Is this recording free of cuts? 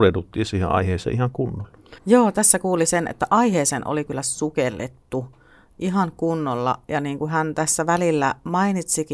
no; 1 cut; at 2.0 s

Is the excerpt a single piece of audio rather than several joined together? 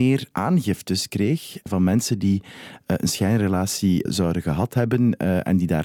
no; 1 cut; at 4.1 s

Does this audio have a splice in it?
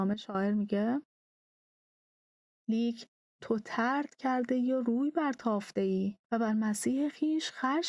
yes; 1 cut; at 6.2 s

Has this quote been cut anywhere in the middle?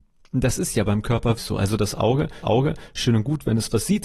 yes; 2 cuts; at 1.4 s, 2.4 s

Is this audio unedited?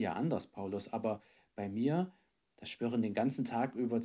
yes; 0 cuts

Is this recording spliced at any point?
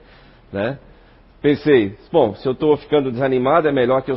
no; 0 cuts

